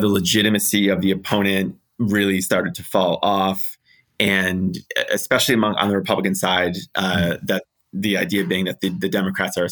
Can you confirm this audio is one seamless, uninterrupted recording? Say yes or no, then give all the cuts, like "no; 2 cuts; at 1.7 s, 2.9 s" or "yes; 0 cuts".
yes; 0 cuts